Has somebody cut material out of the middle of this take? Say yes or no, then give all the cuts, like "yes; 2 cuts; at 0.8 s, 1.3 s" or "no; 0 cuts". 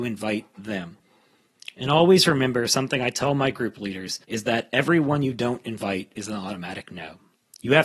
yes; 1 cut; at 4.2 s